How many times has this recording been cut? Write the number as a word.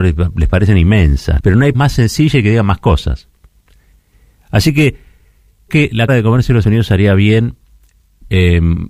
five